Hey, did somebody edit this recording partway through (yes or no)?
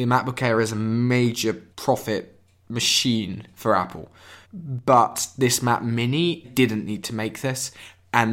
yes